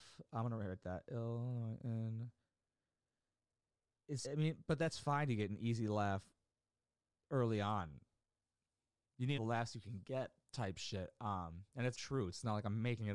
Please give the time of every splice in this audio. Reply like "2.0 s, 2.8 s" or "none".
4.2 s, 9.3 s, 11.9 s